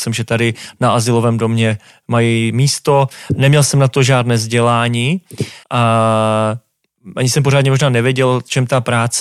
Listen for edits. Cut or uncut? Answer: cut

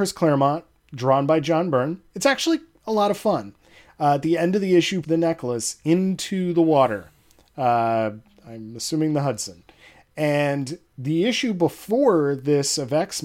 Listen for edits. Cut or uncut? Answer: cut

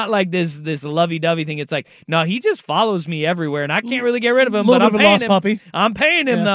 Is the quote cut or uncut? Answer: uncut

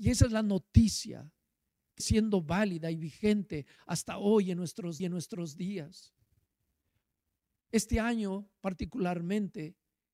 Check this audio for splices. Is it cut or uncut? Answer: cut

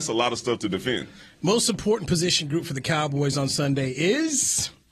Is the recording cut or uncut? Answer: uncut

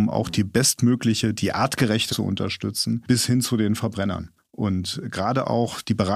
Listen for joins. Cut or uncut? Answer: cut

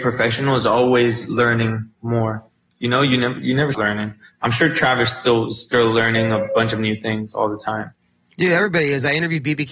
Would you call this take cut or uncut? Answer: cut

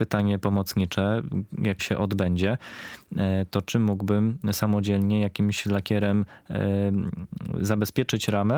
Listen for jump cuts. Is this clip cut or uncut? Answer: cut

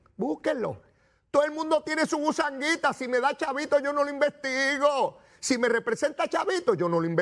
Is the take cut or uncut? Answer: uncut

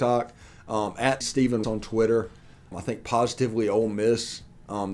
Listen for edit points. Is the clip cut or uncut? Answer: cut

